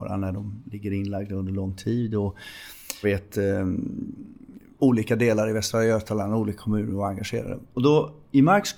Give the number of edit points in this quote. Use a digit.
2